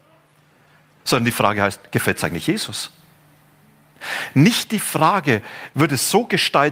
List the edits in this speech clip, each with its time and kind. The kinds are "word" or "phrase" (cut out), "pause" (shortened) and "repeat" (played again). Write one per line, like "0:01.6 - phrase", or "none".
none